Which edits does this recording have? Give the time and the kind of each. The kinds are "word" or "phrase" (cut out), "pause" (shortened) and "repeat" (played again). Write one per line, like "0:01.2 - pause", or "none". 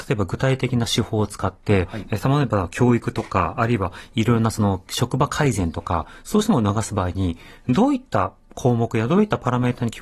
none